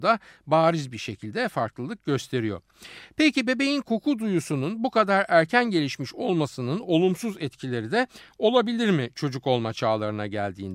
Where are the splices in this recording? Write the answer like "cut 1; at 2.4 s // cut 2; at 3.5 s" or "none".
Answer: none

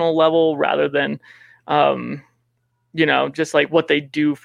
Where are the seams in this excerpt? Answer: none

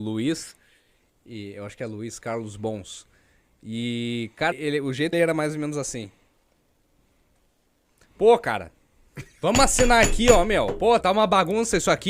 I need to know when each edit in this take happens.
cut 1; at 4.5 s // cut 2; at 5.1 s // cut 3; at 11.0 s

